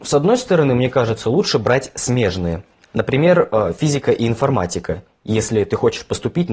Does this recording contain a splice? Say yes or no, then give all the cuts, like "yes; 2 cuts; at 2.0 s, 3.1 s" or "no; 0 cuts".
no; 0 cuts